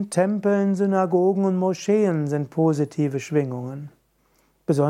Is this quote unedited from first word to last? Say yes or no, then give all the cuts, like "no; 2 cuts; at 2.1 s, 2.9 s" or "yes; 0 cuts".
yes; 0 cuts